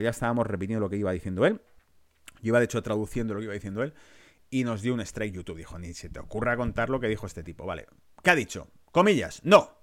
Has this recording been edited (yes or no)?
no